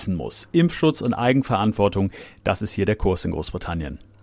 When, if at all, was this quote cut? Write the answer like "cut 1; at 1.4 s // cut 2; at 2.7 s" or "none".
none